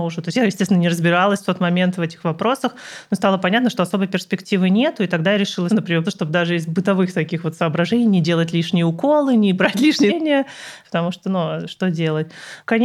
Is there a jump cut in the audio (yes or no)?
yes